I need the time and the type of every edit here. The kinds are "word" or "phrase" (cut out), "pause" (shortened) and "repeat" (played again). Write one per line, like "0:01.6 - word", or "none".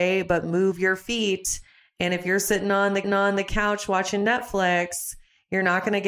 0:03.0 - repeat